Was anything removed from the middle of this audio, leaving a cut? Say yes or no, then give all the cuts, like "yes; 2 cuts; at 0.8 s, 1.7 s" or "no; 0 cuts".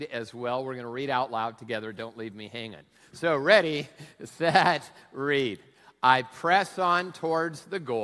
no; 0 cuts